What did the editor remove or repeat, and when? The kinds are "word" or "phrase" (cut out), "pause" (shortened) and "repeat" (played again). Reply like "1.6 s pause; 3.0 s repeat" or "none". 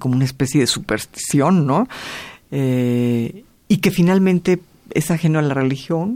none

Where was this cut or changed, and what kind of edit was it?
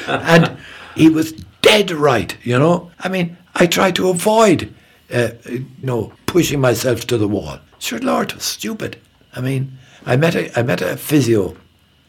1.0 s word; 2.9 s pause; 5.8 s word; 6.2 s pause; 7.7 s pause; 9.1 s pause

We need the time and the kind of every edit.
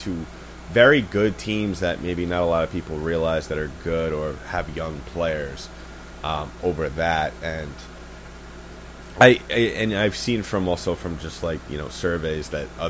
none

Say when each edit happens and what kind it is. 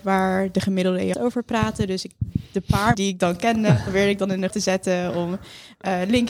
1.1 s word; 2.9 s word; 4.5 s word

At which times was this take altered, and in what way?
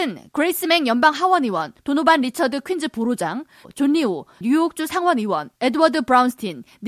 1.8 s pause; 4.4 s phrase; 5.6 s pause

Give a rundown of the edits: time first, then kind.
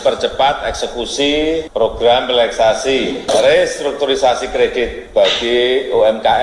none

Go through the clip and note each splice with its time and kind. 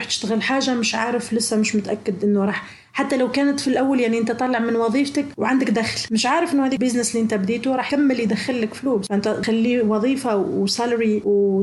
none

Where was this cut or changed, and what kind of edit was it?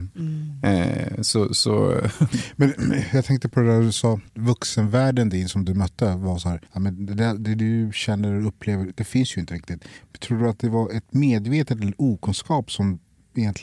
4.3 s pause; 6.7 s pause

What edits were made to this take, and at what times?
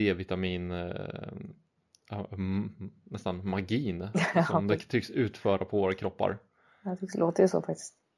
none

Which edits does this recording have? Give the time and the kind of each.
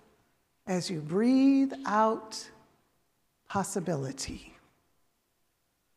none

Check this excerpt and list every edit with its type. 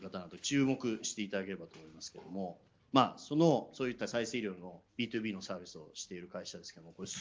4.9 s pause

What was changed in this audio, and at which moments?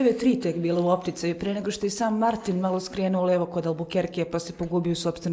none

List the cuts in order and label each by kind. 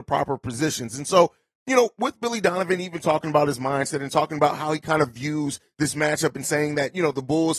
none

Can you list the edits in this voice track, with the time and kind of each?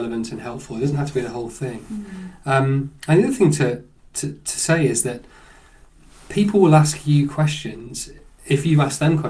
none

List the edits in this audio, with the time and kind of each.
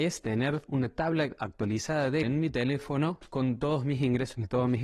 2.2 s word

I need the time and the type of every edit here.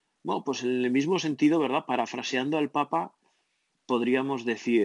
none

